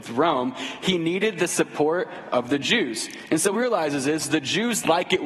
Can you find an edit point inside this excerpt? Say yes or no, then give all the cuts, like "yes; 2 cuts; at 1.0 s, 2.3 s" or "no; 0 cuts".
yes; 1 cut; at 3.5 s